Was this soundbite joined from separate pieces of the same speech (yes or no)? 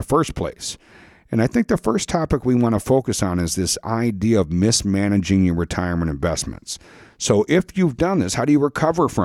no